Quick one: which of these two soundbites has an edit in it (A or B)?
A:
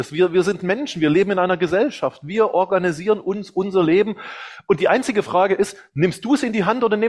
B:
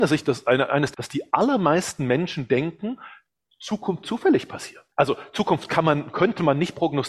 B